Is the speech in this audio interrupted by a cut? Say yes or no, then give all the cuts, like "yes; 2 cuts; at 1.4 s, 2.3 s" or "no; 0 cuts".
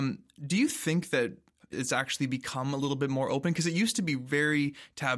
yes; 1 cut; at 1.7 s